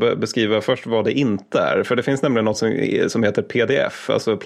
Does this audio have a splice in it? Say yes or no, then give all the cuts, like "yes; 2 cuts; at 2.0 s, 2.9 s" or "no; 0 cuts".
no; 0 cuts